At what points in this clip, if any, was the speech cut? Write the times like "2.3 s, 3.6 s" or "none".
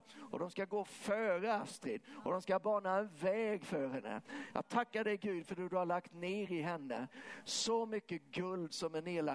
none

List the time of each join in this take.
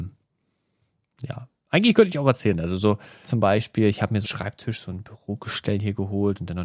3.2 s, 4.2 s

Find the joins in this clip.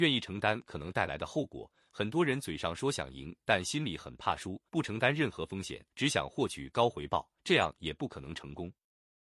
4.7 s, 5.9 s, 7.4 s

